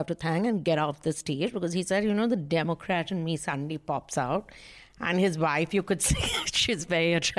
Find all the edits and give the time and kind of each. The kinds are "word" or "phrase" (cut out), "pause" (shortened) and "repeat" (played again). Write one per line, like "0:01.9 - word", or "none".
none